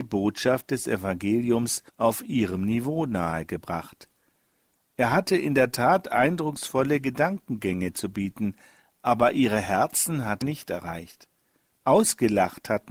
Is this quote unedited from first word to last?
no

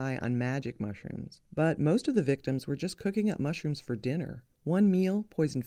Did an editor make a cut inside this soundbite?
yes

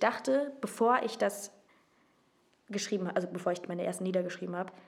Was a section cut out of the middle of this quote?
no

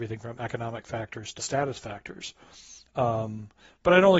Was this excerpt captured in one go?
no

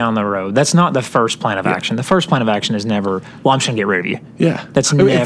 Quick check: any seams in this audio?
no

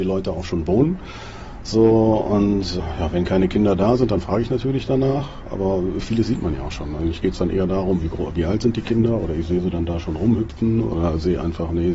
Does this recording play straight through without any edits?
yes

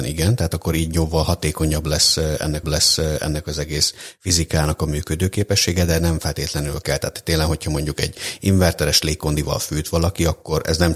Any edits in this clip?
yes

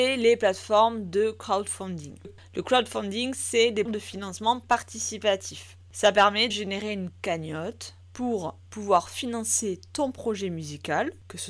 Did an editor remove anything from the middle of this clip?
yes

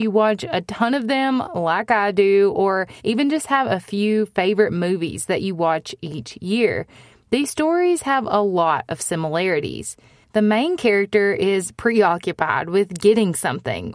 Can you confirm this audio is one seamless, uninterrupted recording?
no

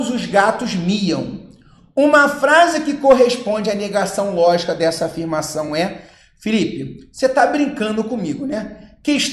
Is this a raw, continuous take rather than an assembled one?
yes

